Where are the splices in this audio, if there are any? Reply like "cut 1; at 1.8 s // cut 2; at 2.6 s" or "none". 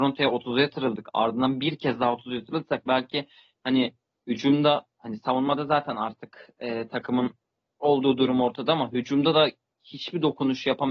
none